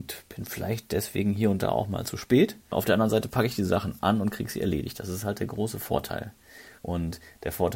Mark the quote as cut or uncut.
cut